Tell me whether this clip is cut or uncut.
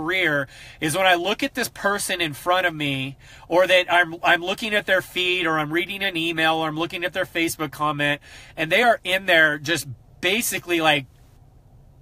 uncut